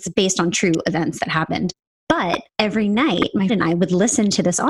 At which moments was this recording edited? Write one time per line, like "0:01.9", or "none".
0:02.5
0:03.5